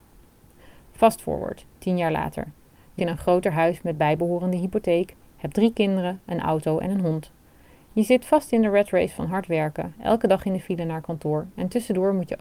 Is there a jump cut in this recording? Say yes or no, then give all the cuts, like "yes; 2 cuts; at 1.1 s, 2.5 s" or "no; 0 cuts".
yes; 2 cuts; at 1.7 s, 3.0 s